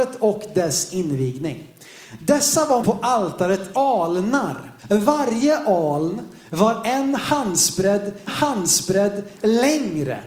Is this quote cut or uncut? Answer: cut